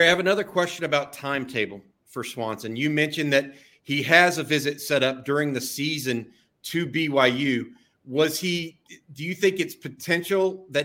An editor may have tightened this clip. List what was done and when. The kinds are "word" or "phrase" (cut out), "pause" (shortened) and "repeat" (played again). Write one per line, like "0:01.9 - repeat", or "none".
none